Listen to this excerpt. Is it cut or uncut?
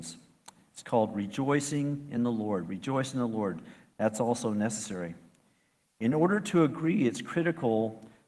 uncut